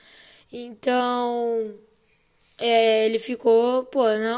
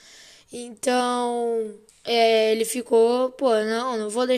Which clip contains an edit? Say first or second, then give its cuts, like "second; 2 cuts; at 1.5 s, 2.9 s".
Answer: second; 1 cut; at 1.9 s